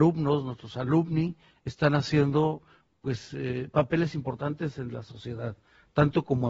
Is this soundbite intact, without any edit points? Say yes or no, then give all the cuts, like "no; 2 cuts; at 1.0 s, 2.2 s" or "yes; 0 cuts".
yes; 0 cuts